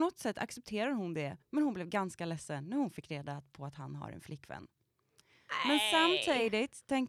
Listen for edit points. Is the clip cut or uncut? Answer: cut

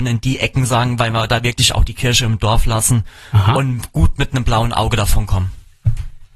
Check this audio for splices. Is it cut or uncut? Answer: uncut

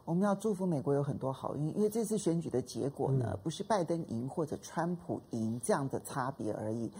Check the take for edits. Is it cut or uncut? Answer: uncut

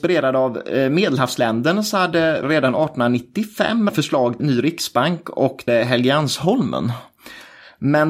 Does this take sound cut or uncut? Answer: cut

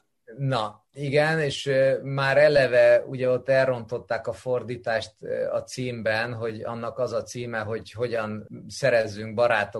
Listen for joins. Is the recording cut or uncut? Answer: uncut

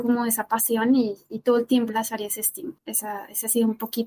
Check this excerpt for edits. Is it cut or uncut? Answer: cut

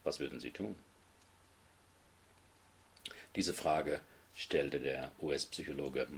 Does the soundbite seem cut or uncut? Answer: uncut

